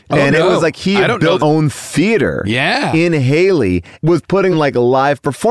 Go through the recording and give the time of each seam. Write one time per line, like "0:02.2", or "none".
0:01.4
0:04.0
0:04.5